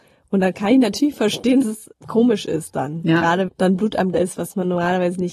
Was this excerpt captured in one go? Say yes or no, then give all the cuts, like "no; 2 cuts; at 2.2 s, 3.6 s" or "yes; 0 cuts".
no; 4 cuts; at 1.6 s, 1.9 s, 3.5 s, 4.1 s